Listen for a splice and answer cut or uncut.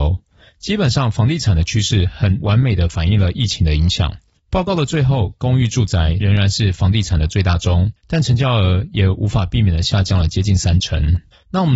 cut